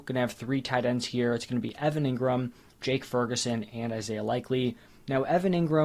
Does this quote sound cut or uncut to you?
uncut